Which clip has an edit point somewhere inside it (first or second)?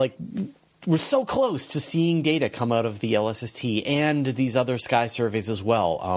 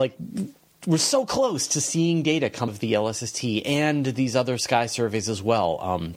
second